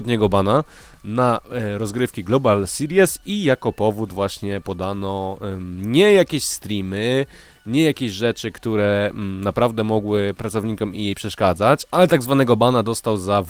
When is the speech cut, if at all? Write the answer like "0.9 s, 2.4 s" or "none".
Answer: none